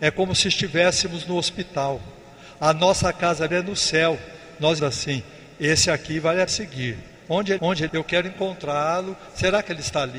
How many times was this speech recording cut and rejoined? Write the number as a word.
five